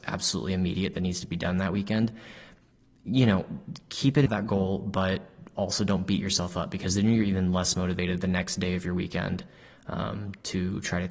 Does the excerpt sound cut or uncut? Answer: cut